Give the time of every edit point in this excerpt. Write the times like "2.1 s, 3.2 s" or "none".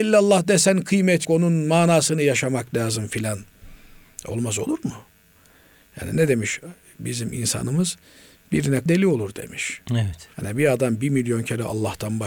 1.2 s, 6.8 s, 8.9 s, 10.3 s